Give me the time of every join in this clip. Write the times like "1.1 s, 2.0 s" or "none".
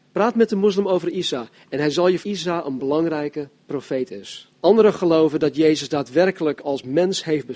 2.2 s, 4.6 s